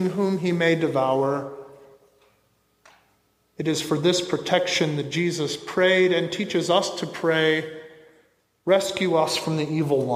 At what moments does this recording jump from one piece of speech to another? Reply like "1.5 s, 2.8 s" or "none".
none